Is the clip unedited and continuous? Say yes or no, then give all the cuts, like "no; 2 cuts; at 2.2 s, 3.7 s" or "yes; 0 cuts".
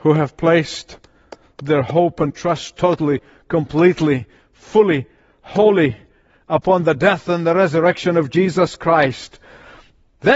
yes; 0 cuts